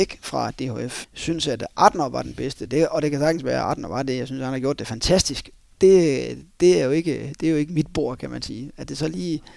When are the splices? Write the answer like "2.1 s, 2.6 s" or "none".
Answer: 1.0 s